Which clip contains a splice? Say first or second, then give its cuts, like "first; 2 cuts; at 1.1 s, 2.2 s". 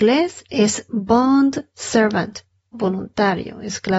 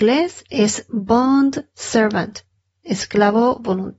first; 1 cut; at 2.7 s